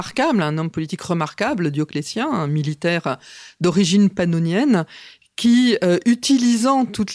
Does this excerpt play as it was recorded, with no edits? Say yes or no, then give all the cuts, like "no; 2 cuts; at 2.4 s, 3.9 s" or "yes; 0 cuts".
yes; 0 cuts